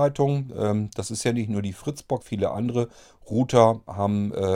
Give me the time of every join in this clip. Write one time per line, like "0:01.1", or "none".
0:02.2